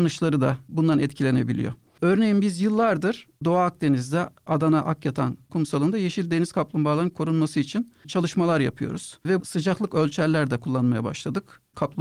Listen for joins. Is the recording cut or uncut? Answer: cut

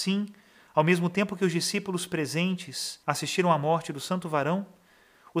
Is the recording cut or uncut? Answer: cut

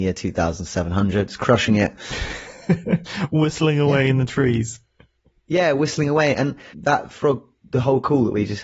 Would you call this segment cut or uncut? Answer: uncut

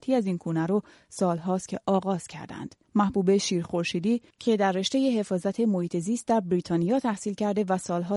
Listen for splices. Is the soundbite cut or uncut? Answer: cut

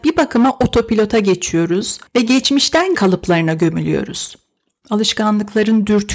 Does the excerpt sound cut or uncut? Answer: cut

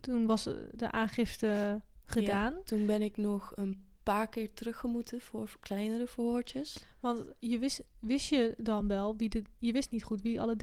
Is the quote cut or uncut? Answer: uncut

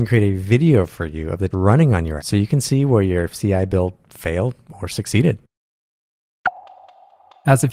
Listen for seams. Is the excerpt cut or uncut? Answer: cut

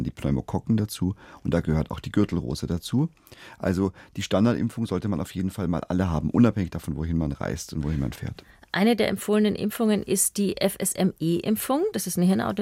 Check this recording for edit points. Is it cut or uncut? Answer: uncut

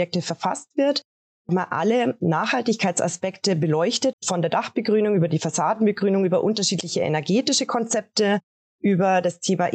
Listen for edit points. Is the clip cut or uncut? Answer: cut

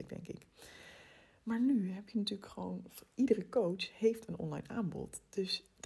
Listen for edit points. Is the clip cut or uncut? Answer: uncut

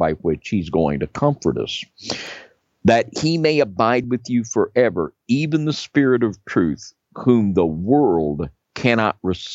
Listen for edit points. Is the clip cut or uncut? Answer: uncut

